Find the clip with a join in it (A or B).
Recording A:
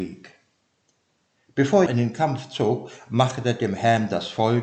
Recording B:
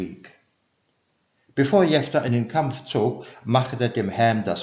A